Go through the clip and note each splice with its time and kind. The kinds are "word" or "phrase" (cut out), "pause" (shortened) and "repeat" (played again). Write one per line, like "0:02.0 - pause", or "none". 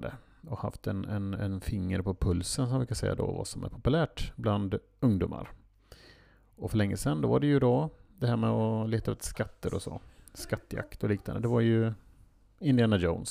none